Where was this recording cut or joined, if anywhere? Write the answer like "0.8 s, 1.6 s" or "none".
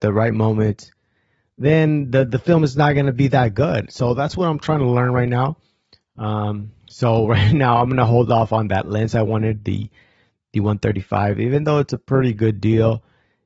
6.8 s